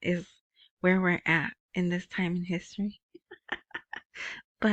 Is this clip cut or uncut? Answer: cut